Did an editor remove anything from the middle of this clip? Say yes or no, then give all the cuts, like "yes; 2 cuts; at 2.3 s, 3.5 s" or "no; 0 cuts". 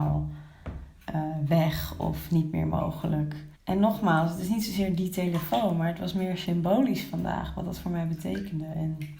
yes; 1 cut; at 3.6 s